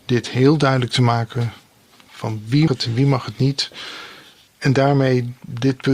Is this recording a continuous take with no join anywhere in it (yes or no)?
no